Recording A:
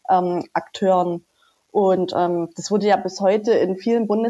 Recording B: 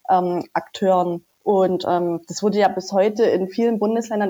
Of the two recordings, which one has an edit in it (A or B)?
B